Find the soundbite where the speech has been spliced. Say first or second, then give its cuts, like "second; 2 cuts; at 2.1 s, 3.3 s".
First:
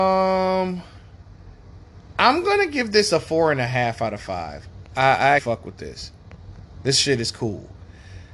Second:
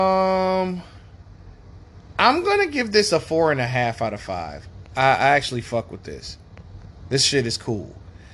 first; 1 cut; at 5.4 s